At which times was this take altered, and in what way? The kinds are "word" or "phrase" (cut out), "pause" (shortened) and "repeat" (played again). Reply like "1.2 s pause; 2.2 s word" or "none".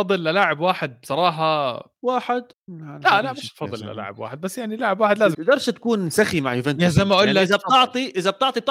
2.5 s pause; 5.3 s word